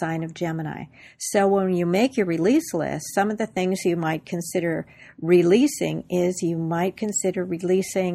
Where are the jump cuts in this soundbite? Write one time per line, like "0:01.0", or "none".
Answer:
none